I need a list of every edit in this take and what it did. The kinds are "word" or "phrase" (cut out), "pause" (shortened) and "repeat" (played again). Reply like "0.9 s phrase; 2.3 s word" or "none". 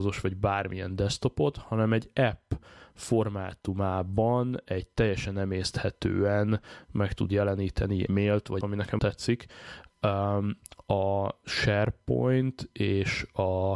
8.1 s word; 8.6 s phrase; 9.0 s word